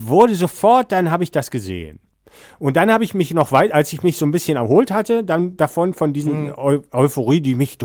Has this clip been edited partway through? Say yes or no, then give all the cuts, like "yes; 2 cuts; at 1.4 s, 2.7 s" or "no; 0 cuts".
no; 0 cuts